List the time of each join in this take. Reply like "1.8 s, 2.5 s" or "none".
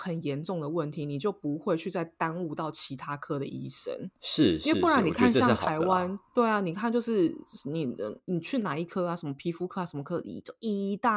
6.3 s